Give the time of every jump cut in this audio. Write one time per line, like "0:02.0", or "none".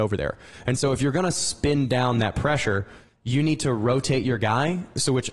none

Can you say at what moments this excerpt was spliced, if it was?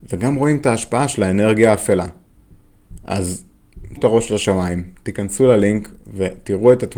0:04.0

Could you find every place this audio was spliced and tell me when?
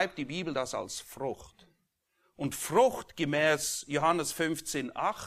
none

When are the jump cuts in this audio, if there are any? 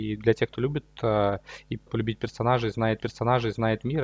0:01.9
0:03.0

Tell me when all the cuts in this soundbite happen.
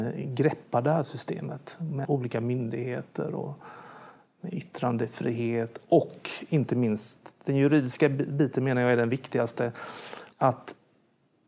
0:02.0
0:10.3

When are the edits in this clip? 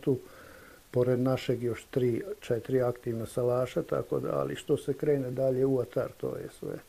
none

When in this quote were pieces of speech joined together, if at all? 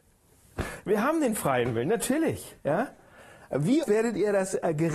0:02.6
0:03.8

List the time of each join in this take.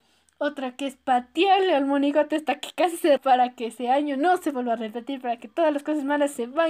0:03.2

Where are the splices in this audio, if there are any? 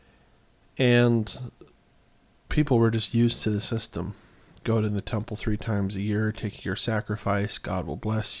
none

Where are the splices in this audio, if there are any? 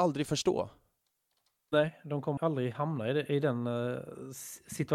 0:02.4

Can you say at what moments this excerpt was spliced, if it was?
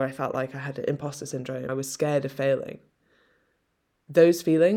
0:01.7

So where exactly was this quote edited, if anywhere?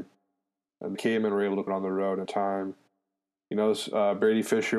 0:01.0
0:01.7
0:02.3

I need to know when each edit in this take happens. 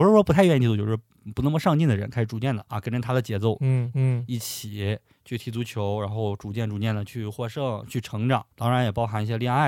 0:02.7
0:03.9
0:08.5

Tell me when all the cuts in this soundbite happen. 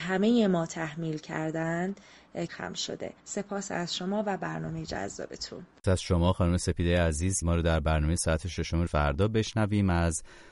0:02.5
0:03.2
0:05.8
0:07.4
0:08.9

